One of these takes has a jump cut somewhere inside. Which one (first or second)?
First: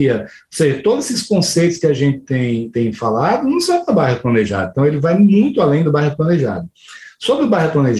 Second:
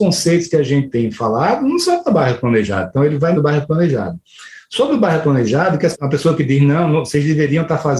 second